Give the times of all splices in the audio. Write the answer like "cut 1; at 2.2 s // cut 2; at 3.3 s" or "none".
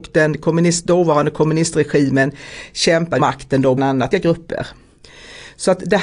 cut 1; at 3.2 s // cut 2; at 3.8 s // cut 3; at 4.1 s